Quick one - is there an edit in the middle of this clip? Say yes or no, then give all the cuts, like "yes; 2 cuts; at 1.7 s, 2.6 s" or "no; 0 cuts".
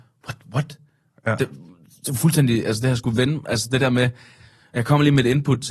no; 0 cuts